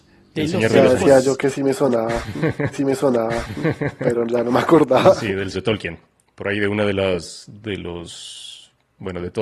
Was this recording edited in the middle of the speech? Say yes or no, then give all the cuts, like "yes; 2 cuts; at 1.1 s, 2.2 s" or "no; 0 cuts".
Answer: yes; 3 cuts; at 2.7 s, 5.5 s, 6.2 s